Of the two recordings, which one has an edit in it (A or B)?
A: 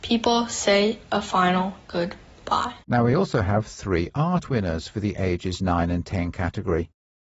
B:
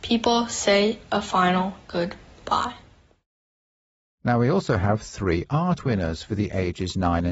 A